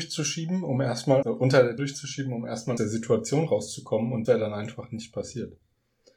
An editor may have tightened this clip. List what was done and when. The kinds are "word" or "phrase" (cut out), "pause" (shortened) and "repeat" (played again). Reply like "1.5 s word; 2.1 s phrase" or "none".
1.2 s word; 1.8 s word; 2.8 s word; 4.2 s word